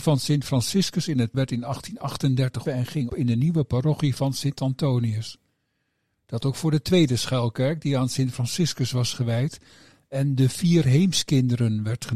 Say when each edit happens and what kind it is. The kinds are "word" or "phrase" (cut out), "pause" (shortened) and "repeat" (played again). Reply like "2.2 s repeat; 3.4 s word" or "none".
1.3 s word; 2.7 s word; 3.1 s word; 6.4 s word

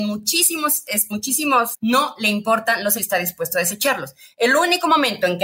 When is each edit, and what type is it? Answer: 1.1 s word; 1.7 s word; 3.0 s word

